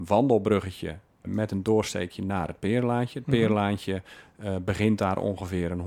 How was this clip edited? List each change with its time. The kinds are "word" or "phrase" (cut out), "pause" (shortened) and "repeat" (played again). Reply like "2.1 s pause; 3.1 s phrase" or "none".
1.2 s word